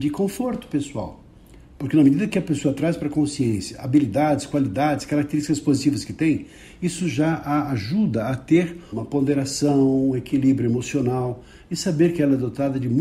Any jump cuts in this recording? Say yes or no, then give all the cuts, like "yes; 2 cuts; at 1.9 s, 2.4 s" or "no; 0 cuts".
yes; 1 cut; at 8.9 s